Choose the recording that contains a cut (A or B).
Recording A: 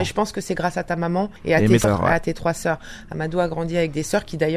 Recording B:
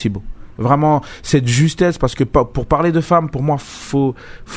A